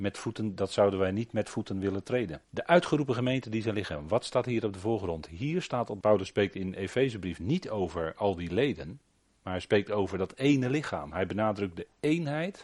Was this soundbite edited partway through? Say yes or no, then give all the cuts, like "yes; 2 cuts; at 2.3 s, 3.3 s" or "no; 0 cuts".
yes; 2 cuts; at 2.4 s, 6.0 s